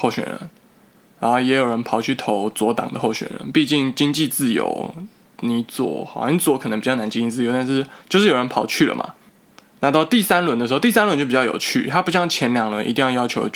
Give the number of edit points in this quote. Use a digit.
3